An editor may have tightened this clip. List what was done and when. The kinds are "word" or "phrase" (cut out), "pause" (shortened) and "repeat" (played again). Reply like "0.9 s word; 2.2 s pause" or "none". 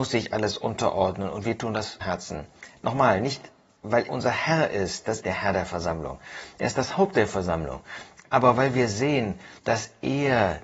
2.0 s word; 4.1 s word; 5.2 s phrase; 9.6 s pause